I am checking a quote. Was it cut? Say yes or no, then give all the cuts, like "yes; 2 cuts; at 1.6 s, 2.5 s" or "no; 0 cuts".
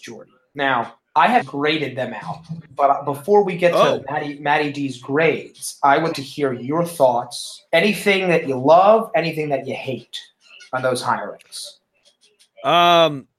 yes; 4 cuts; at 1.0 s, 1.4 s, 6.1 s, 7.7 s